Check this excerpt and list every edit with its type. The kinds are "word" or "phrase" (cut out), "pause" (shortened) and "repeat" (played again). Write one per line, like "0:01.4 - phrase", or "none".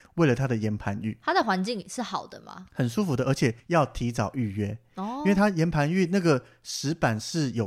0:03.6 - pause